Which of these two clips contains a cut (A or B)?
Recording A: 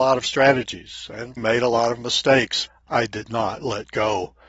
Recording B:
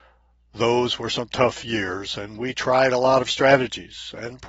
A